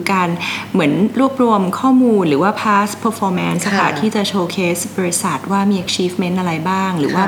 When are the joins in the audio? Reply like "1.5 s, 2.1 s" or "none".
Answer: none

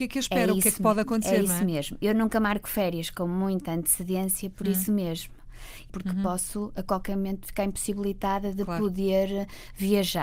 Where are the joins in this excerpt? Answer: none

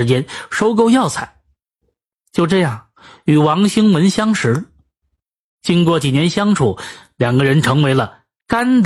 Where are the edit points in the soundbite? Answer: none

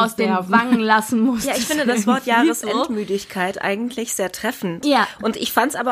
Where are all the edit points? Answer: none

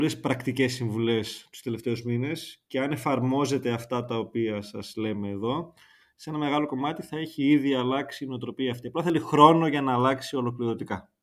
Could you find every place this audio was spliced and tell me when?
none

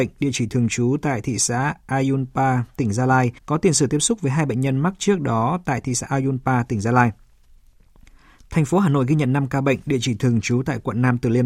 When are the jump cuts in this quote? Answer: 3.4 s

